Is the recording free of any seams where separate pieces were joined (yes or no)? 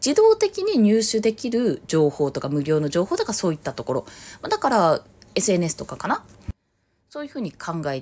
yes